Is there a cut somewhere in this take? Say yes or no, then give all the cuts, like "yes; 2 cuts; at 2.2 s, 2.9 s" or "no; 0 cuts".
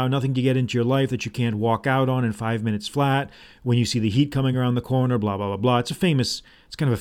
no; 0 cuts